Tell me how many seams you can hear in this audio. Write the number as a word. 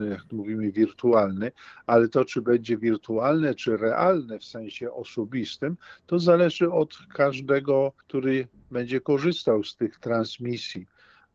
one